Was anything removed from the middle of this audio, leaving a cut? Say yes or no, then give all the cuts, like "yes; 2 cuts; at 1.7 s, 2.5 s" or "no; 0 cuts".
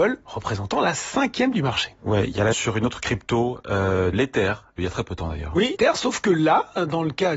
yes; 5 cuts; at 1.5 s, 2.5 s, 4.1 s, 4.8 s, 5.7 s